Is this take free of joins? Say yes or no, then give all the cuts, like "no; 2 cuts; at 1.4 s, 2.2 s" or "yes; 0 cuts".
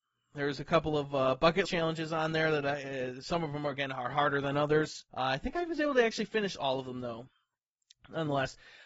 no; 2 cuts; at 1.6 s, 5.1 s